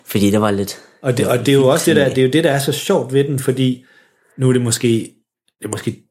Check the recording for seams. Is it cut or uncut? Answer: uncut